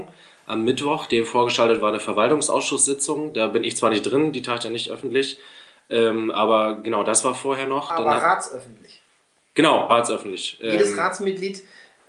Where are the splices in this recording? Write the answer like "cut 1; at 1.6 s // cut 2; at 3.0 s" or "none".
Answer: cut 1; at 9.9 s

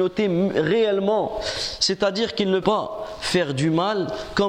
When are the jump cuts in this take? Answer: cut 1; at 2.6 s

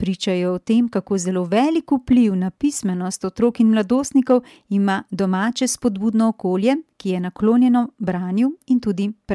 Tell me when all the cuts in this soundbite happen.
none

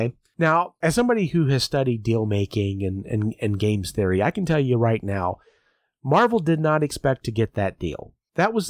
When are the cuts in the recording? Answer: none

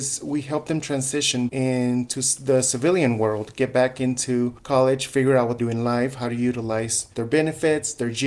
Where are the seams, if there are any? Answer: cut 1; at 1.5 s // cut 2; at 5.6 s

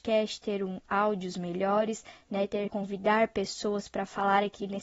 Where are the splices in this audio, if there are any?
cut 1; at 2.7 s

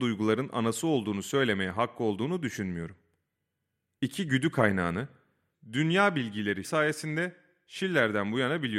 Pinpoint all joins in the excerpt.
cut 1; at 6.6 s

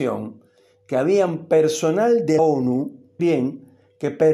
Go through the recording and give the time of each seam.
cut 1; at 2.4 s // cut 2; at 3.2 s

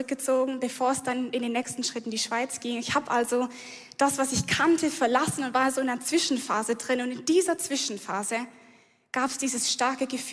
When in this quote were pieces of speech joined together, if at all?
none

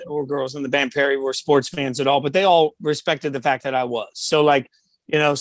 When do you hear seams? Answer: none

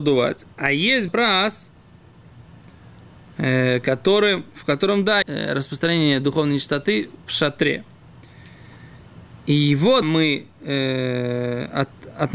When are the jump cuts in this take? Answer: cut 1; at 1.1 s // cut 2; at 5.2 s // cut 3; at 10.0 s

